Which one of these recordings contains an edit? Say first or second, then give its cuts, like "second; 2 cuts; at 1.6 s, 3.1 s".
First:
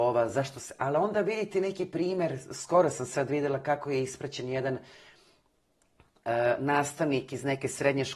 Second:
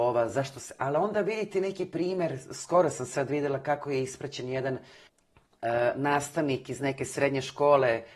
second; 1 cut; at 5.1 s